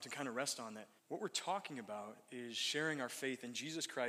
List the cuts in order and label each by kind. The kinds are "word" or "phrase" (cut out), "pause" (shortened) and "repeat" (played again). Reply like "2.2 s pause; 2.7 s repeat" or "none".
1.0 s pause